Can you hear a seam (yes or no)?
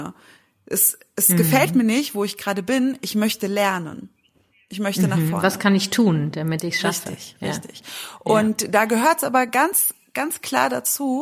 no